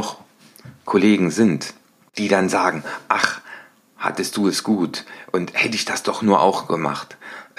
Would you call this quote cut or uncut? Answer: uncut